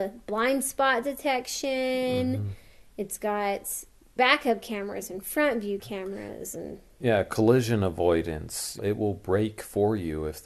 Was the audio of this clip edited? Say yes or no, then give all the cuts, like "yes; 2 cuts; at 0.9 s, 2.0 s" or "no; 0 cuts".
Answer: no; 0 cuts